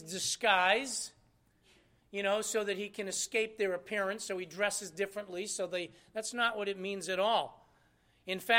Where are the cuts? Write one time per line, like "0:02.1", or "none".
none